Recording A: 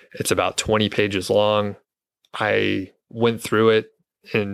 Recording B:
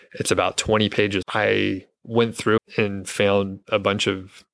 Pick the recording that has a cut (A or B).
B